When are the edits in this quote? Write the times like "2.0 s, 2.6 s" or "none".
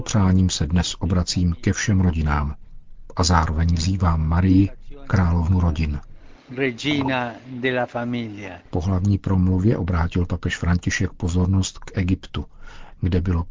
8.6 s